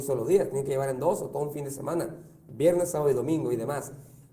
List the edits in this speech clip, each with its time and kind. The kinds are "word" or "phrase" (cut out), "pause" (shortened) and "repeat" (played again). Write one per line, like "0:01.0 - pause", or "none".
none